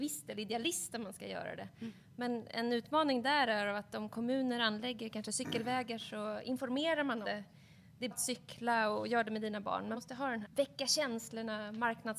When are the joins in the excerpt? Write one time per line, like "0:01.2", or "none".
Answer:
0:07.2
0:08.1
0:09.9
0:10.4